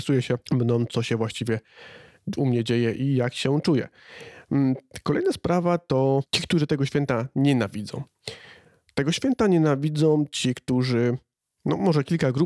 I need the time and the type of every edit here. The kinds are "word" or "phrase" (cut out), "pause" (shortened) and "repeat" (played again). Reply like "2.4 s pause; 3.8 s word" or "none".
none